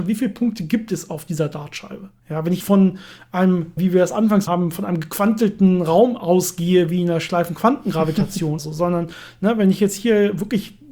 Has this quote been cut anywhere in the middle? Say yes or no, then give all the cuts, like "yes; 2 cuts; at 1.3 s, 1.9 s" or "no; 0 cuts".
yes; 5 cuts; at 2.2 s, 2.6 s, 3.8 s, 4.5 s, 8.6 s